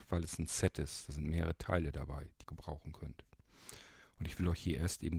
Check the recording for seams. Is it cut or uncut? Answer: cut